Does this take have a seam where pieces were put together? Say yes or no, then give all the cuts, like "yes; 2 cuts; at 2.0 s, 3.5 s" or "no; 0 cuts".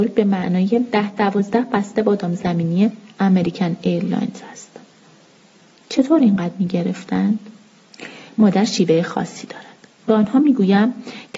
no; 0 cuts